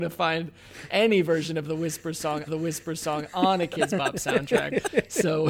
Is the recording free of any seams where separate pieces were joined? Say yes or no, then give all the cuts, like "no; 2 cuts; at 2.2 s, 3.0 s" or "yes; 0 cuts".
no; 1 cut; at 2.5 s